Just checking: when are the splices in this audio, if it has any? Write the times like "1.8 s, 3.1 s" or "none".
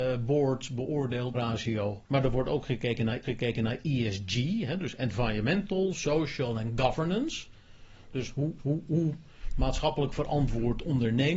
1.3 s, 2.0 s, 3.2 s, 8.6 s